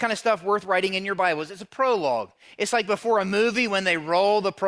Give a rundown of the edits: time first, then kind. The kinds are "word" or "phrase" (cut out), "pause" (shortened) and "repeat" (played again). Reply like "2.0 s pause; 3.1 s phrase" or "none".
none